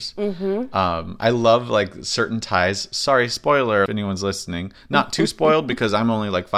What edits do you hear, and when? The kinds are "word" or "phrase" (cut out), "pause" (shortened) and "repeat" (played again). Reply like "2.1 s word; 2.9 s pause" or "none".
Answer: 3.9 s phrase